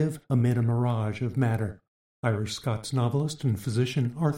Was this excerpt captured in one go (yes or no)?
yes